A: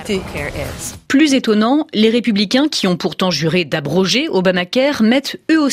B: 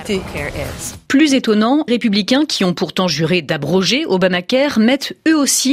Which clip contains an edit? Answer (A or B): B